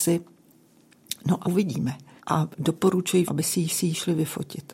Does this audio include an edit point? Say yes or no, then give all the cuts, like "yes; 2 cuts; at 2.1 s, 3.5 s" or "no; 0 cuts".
yes; 4 cuts; at 1.4 s, 2.2 s, 3.3 s, 3.7 s